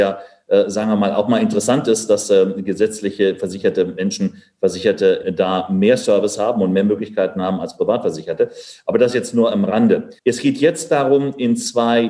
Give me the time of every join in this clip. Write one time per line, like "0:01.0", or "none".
0:05.2
0:10.2